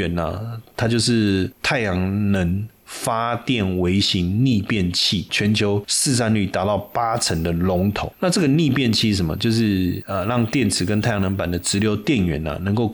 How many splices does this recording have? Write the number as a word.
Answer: one